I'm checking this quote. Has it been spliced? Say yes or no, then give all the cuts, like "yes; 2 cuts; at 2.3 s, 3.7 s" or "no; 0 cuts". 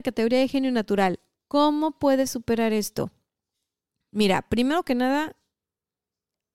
no; 0 cuts